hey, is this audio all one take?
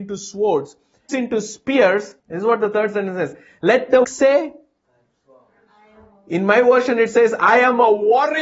no; 3 cuts; at 1.1 s, 2.2 s, 4.0 s

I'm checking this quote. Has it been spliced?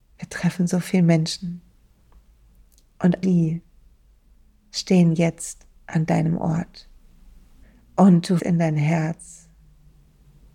yes; 4 cuts; at 3.2 s, 5.8 s, 7.6 s, 8.4 s

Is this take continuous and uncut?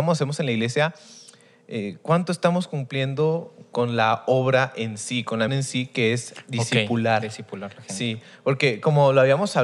no; 1 cut; at 5.5 s

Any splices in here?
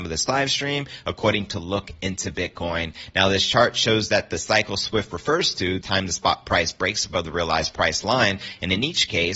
yes; 1 cut; at 5.8 s

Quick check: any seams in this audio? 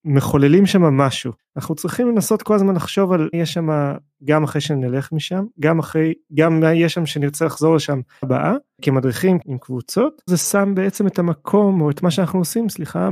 yes; 5 cuts; at 1.4 s, 3.3 s, 8.2 s, 9.4 s, 10.3 s

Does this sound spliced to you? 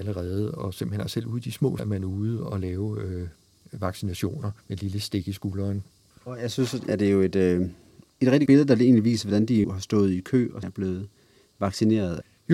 yes; 7 cuts; at 1.8 s, 4.6 s, 5.9 s, 6.9 s, 8.5 s, 9.6 s, 10.6 s

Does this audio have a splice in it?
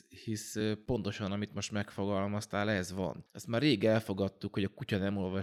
no; 0 cuts

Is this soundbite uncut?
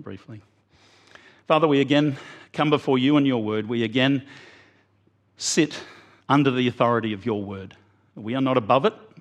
no; 1 cut; at 6.2 s

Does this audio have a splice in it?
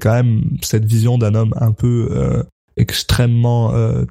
no; 0 cuts

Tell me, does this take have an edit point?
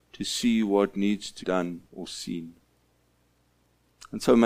yes; 2 cuts; at 1.4 s, 1.9 s

